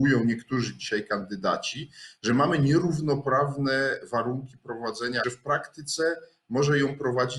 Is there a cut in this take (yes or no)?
yes